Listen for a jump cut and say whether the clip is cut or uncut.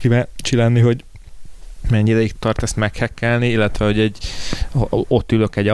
cut